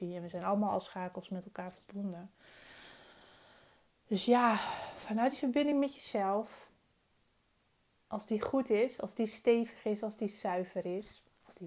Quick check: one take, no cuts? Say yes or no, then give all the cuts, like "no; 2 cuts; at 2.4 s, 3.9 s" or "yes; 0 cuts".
yes; 0 cuts